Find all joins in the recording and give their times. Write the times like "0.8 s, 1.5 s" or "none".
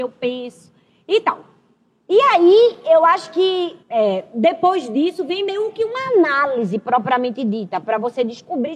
3.8 s